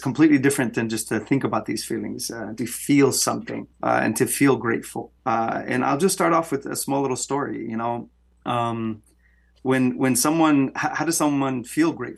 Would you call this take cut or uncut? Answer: cut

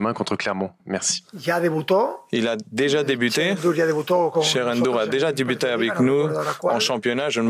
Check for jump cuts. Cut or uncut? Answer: uncut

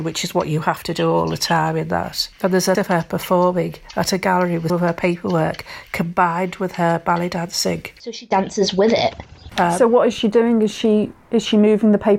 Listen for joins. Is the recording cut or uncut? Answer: cut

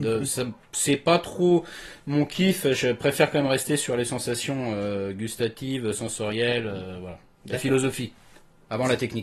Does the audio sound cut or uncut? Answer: uncut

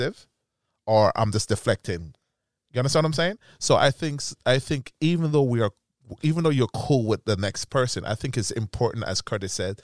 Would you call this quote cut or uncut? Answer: uncut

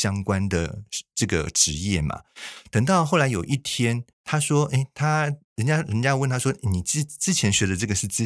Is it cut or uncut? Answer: cut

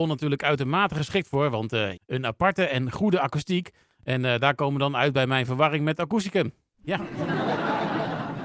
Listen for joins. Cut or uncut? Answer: cut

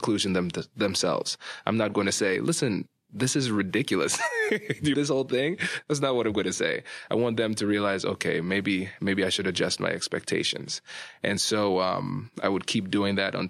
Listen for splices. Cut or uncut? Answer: cut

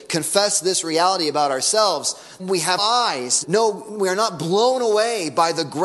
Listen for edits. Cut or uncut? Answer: cut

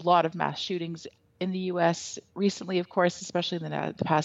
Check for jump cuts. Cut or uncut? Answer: uncut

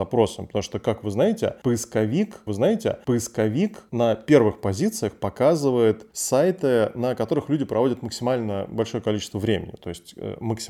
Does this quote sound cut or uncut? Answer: cut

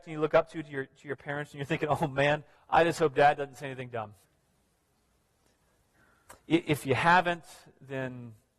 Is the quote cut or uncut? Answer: cut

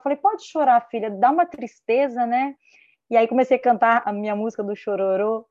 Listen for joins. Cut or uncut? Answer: cut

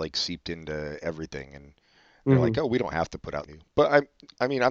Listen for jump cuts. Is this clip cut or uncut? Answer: cut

